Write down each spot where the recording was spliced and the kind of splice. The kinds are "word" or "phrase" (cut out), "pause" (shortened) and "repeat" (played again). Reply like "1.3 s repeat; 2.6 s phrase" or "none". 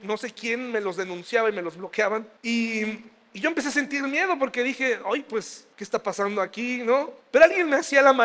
2.4 s pause; 5.7 s pause; 7.2 s pause